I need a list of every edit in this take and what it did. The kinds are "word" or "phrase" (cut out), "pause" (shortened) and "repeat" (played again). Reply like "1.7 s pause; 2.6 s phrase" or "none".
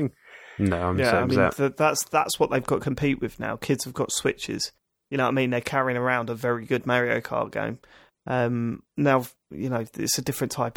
none